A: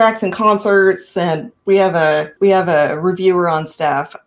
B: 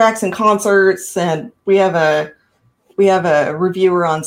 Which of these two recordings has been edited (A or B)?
A